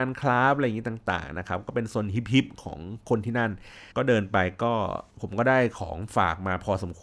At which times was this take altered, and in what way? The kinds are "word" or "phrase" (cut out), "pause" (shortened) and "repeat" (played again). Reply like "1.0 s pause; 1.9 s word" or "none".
3.9 s pause; 5.1 s pause